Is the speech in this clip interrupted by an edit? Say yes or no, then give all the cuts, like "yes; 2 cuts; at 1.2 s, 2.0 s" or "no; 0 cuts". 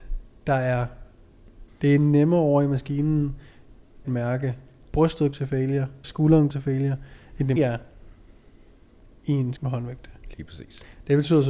yes; 7 cuts; at 1.7 s, 4.0 s, 5.3 s, 6.0 s, 6.5 s, 7.6 s, 9.6 s